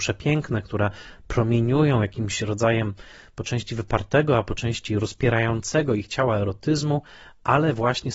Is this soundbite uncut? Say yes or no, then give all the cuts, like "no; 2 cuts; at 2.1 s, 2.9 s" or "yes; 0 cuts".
yes; 0 cuts